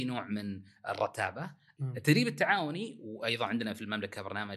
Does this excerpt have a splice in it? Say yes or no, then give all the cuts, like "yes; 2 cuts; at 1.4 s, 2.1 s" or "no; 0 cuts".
yes; 1 cut; at 1.8 s